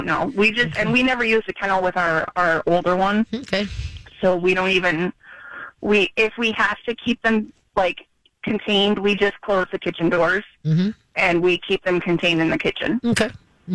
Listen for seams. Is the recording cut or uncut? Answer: uncut